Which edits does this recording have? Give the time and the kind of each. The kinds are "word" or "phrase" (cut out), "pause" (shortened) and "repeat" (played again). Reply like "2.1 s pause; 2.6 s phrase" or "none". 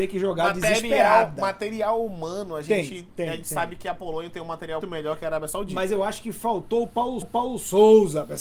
4.8 s word; 7.2 s repeat